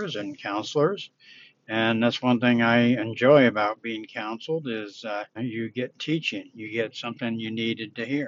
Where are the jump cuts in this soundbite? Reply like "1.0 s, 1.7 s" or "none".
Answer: 5.4 s